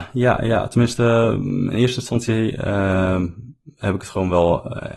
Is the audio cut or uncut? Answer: uncut